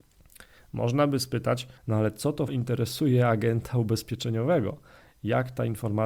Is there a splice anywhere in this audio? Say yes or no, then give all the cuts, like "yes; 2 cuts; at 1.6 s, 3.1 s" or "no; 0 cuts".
yes; 2 cuts; at 1.8 s, 2.5 s